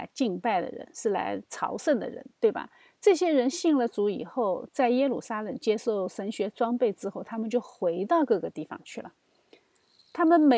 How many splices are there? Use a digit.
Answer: 0